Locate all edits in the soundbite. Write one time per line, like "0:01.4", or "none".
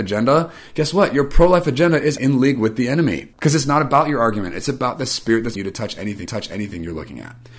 0:02.2
0:03.3
0:05.6
0:06.3